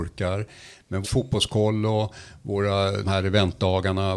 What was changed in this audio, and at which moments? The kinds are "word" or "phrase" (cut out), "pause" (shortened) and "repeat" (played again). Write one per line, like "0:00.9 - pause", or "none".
0:01.0 - word
0:03.0 - word